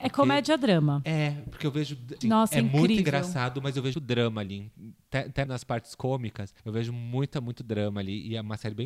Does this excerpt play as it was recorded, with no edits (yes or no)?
no